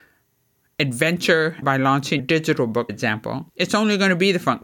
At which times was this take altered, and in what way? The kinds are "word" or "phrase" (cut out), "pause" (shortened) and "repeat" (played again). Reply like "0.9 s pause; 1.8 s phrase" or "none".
1.6 s phrase; 2.2 s word; 2.9 s word; 3.5 s pause